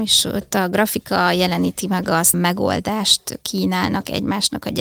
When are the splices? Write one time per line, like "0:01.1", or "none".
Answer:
0:02.3